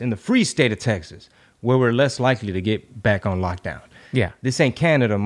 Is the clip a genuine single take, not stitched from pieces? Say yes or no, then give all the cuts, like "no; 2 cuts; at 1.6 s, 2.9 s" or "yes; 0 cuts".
yes; 0 cuts